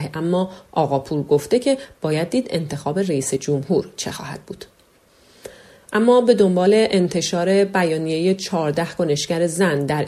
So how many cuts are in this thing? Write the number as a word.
zero